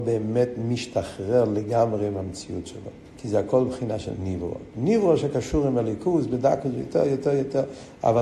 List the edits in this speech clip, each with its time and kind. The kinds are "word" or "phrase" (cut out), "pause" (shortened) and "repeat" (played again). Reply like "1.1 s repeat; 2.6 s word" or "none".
3.1 s pause